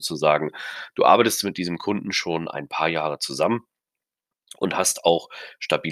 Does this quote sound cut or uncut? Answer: uncut